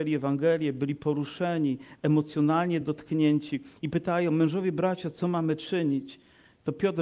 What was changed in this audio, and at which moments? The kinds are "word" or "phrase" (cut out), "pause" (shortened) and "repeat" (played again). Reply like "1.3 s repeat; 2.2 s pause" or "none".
none